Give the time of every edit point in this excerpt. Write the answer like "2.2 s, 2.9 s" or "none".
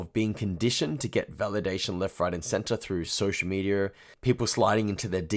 none